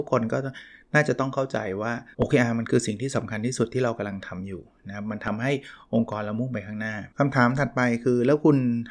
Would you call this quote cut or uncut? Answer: cut